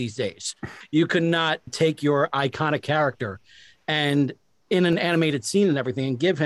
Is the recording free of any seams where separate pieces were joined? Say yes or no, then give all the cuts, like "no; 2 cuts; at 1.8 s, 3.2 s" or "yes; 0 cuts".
yes; 0 cuts